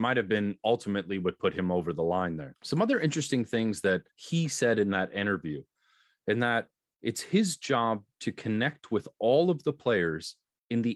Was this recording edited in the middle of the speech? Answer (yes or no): yes